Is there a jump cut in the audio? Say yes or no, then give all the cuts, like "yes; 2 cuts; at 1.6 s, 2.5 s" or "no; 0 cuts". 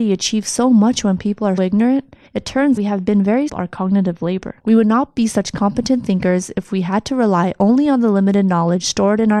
yes; 5 cuts; at 1.6 s, 2.3 s, 2.8 s, 3.5 s, 4.6 s